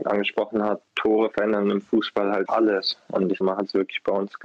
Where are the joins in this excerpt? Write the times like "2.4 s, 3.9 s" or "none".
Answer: 2.5 s, 3.4 s